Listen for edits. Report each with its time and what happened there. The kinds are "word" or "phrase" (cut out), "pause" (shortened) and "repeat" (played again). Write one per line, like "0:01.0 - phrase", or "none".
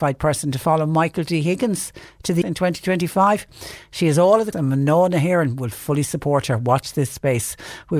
0:02.4 - word
0:04.5 - word